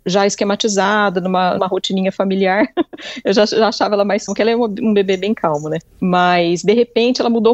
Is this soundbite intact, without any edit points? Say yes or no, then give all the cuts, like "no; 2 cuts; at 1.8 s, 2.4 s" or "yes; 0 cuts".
no; 3 cuts; at 1.6 s, 4.3 s, 5.9 s